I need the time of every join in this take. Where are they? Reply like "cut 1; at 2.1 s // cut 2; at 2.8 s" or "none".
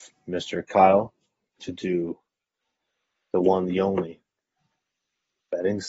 none